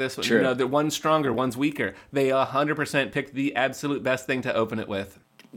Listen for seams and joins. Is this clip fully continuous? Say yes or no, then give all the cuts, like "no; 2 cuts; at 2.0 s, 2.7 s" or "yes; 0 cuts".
yes; 0 cuts